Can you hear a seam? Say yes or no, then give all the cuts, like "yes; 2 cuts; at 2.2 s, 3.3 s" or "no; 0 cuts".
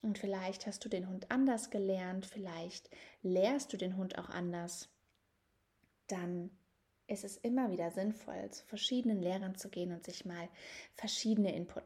no; 0 cuts